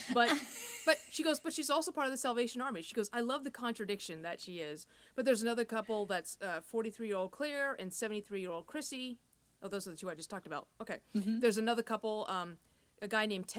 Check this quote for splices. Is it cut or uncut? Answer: uncut